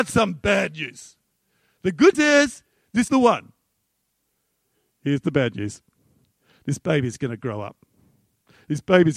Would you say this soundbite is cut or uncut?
cut